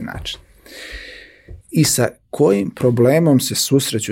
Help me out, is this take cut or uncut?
cut